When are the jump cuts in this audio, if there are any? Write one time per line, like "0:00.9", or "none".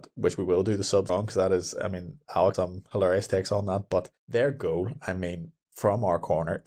0:01.1
0:02.5
0:04.2